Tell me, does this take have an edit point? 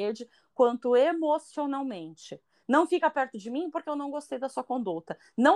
no; 0 cuts

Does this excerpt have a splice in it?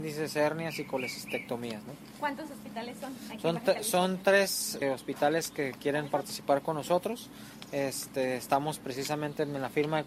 yes; 1 cut; at 4.8 s

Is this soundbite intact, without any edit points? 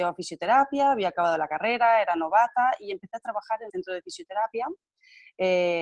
no; 1 cut; at 3.7 s

